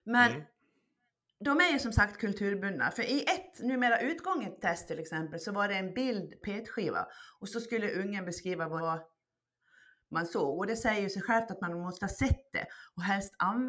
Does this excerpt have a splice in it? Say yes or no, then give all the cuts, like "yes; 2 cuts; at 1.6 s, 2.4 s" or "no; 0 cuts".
yes; 2 cuts; at 6.4 s, 8.8 s